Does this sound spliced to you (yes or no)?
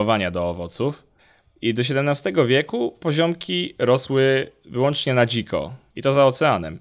no